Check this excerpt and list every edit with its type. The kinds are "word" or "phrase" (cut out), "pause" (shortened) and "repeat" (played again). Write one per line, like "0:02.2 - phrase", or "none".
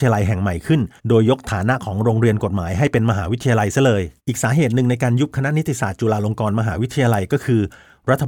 0:01.0 - pause
0:04.2 - pause